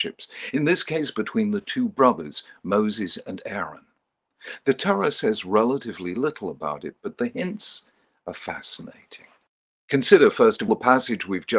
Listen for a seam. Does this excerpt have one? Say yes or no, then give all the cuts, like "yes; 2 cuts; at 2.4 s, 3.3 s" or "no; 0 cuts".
yes; 1 cut; at 10.7 s